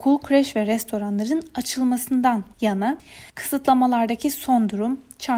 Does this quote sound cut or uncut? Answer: cut